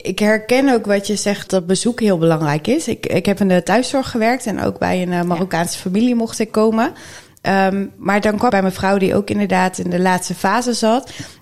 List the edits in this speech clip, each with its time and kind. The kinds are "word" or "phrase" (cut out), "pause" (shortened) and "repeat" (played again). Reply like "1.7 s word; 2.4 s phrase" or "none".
1.5 s word; 3.4 s word; 8.5 s word